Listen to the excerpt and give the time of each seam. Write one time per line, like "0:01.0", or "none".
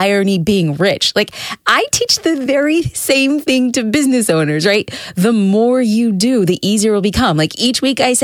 none